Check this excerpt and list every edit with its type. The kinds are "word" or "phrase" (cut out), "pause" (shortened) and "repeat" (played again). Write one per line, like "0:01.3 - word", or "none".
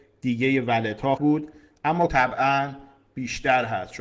0:01.2 - word
0:02.1 - word